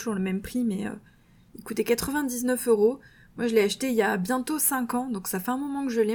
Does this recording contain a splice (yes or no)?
no